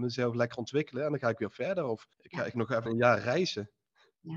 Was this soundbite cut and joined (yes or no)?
yes